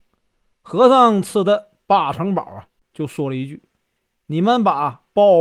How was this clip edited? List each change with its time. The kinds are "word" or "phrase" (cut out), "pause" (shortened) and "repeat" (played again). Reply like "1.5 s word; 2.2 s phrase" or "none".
none